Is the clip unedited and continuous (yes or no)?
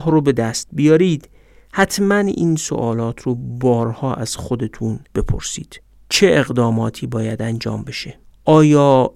yes